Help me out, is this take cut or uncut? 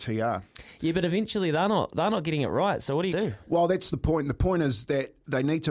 cut